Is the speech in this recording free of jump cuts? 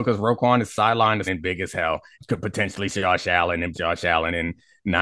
no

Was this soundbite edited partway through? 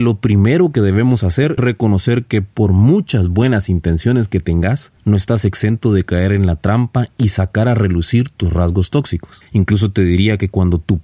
yes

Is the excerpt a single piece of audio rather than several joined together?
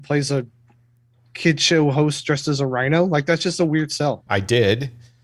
no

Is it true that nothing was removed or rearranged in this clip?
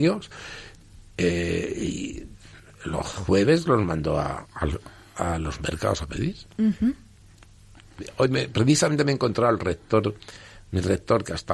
yes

